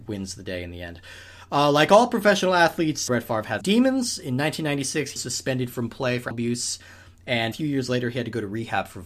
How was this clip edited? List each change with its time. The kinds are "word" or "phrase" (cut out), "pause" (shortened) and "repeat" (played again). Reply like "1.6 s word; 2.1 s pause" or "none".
3.1 s word; 3.6 s word; 5.2 s word; 6.3 s word; 7.5 s word